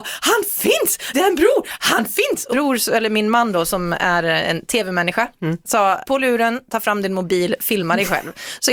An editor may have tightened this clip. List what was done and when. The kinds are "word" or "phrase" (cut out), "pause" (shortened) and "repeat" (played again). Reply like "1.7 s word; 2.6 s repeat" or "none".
1.1 s word; 2.5 s word; 6.0 s word